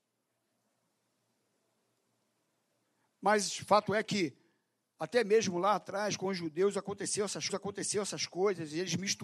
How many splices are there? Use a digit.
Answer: 1